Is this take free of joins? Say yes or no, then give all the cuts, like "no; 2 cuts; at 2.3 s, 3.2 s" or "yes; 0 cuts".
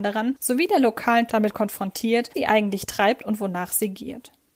no; 2 cuts; at 1.3 s, 2.3 s